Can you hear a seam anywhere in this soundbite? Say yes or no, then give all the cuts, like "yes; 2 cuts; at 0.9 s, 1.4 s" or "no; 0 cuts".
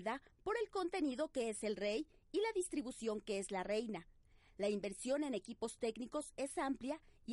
no; 0 cuts